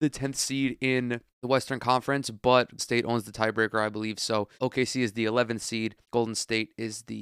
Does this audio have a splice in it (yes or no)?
yes